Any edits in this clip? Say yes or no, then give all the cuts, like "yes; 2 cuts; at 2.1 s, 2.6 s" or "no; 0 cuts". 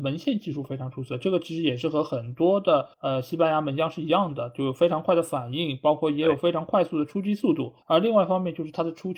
yes; 2 cuts; at 2.9 s, 7.8 s